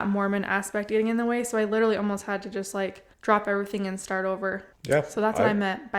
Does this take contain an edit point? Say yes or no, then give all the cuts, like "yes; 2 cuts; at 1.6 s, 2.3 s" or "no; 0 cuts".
yes; 2 cuts; at 3.1 s, 4.7 s